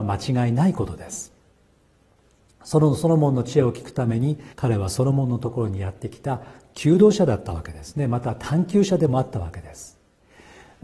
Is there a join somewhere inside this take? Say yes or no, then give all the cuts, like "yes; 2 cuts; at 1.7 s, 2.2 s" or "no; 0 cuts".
yes; 1 cut; at 4.5 s